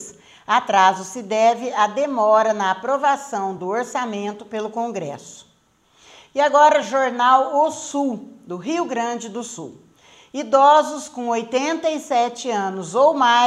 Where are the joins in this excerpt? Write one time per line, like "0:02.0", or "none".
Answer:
none